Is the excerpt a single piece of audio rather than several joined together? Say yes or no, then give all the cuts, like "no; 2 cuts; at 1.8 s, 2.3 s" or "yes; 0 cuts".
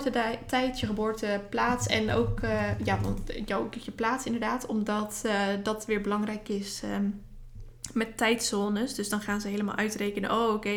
yes; 0 cuts